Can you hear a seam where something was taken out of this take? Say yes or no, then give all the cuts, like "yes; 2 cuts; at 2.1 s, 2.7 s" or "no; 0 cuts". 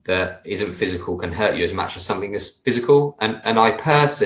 no; 0 cuts